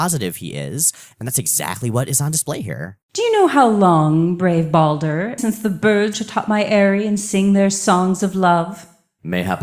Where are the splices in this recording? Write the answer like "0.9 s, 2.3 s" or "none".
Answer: 3.0 s, 5.4 s, 6.1 s